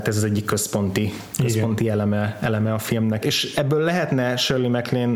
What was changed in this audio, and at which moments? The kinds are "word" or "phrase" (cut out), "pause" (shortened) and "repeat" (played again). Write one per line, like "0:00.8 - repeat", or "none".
0:03.2 - word